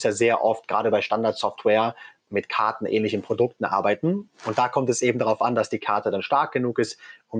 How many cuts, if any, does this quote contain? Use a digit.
0